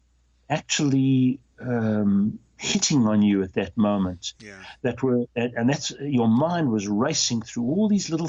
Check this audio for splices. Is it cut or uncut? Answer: cut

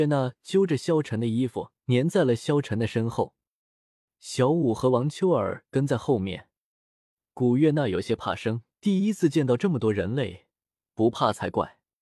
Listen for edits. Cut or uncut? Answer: cut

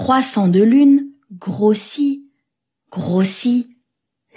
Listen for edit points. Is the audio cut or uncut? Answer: uncut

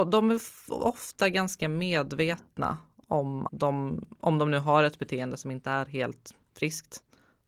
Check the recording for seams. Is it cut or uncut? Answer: cut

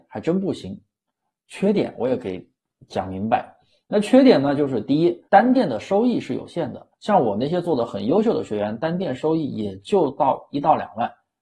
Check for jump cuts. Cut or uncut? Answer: cut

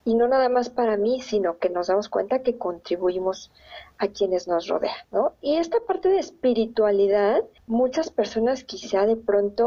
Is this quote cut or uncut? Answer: cut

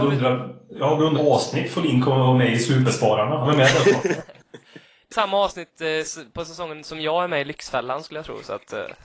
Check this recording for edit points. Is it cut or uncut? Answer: cut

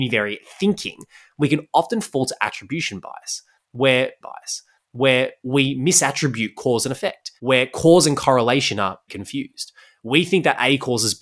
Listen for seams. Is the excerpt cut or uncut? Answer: cut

